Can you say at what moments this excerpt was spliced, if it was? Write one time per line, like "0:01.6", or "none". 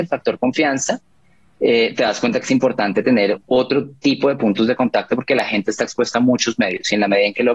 none